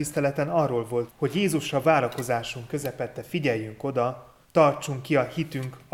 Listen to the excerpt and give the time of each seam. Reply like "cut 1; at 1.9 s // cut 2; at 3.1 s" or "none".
cut 1; at 1.1 s // cut 2; at 1.8 s // cut 3; at 4.4 s